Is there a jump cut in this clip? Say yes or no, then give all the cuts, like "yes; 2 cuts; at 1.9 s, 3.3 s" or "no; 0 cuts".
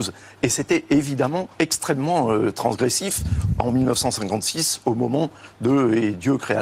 yes; 1 cut; at 1.5 s